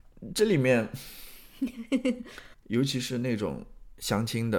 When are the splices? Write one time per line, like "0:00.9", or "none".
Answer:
0:02.5